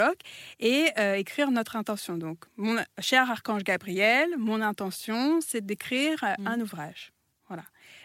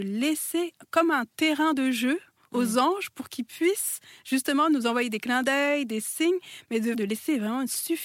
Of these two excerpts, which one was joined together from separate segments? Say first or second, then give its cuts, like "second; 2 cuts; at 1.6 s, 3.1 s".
second; 1 cut; at 6.9 s